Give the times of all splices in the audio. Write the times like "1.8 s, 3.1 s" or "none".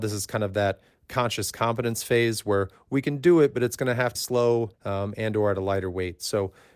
4.2 s, 4.7 s